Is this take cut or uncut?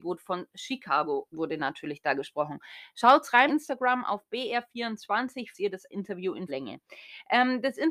cut